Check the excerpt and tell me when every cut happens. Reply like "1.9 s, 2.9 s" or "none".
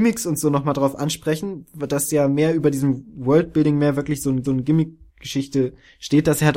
4.4 s